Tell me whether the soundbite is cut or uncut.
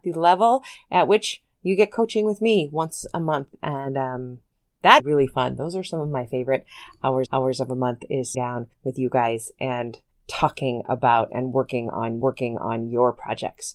cut